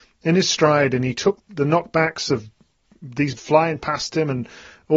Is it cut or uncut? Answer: cut